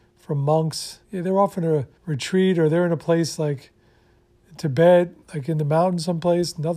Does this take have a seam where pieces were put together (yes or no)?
yes